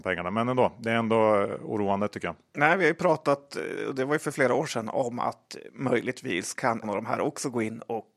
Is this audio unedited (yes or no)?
no